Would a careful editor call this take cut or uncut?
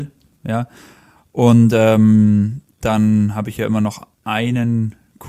cut